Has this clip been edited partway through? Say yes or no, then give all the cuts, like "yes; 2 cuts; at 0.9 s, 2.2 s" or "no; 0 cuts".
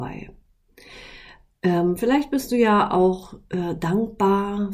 no; 0 cuts